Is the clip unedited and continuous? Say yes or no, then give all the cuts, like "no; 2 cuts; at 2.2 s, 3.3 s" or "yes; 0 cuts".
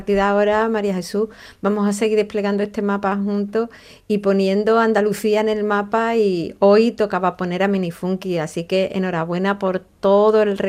yes; 0 cuts